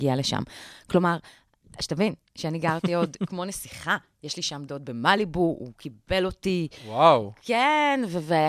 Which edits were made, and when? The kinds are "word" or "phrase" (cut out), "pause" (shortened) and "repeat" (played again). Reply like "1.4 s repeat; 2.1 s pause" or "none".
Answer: none